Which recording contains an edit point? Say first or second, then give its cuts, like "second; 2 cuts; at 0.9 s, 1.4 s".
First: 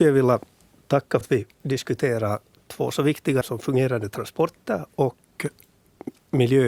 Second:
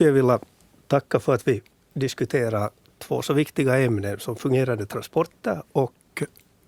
first; 3 cuts; at 1.2 s, 1.5 s, 3.4 s